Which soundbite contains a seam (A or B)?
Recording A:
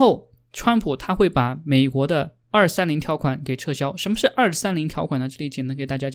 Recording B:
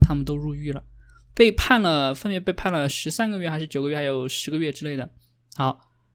A